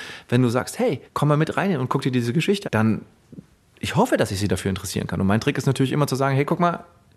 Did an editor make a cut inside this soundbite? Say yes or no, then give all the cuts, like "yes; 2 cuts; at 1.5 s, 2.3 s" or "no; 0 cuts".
yes; 2 cuts; at 1.1 s, 2.6 s